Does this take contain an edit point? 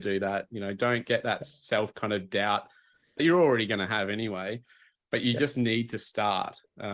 no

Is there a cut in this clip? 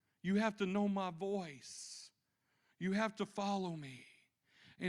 no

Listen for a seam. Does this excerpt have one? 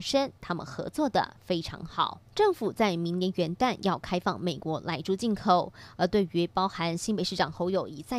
yes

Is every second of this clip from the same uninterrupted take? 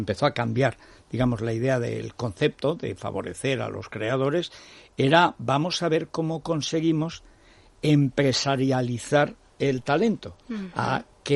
yes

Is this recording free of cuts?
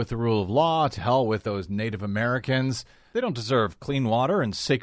yes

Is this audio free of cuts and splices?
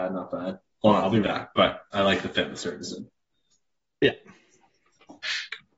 no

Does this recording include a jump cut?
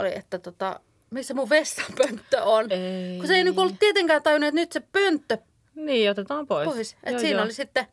no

